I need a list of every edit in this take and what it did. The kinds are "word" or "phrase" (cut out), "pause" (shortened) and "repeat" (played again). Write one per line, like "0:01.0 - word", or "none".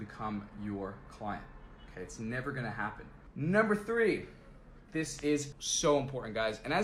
0:05.5 - word